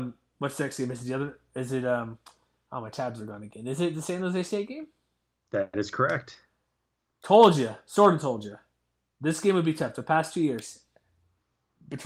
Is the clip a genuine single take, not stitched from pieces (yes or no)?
yes